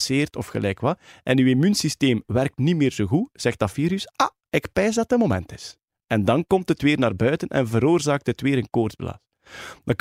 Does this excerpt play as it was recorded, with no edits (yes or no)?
yes